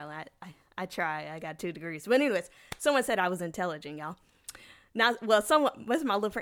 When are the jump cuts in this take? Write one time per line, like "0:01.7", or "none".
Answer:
none

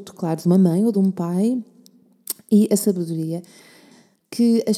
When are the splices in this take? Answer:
none

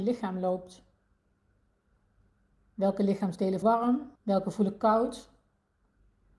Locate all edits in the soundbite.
0:03.6
0:04.2

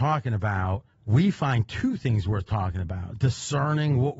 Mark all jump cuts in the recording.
0:00.9

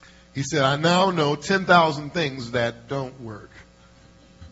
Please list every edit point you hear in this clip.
none

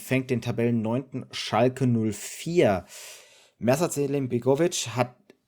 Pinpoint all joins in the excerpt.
none

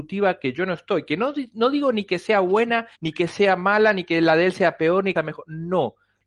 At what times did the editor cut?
0:02.9
0:05.1

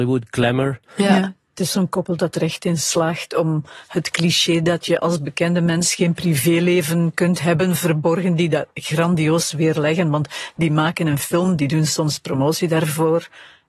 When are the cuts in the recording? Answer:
none

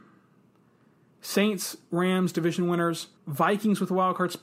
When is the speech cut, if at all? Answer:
0:03.2

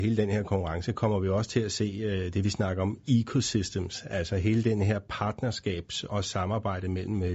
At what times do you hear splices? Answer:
0:06.1

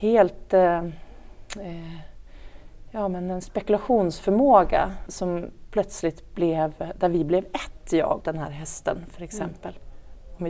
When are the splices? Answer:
0:05.1
0:08.2

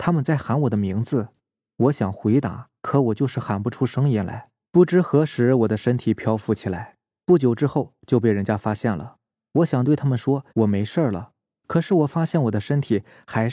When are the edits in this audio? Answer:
0:02.8
0:04.7
0:10.5

